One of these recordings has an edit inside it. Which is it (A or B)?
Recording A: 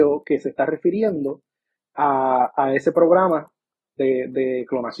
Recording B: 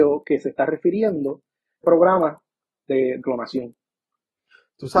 B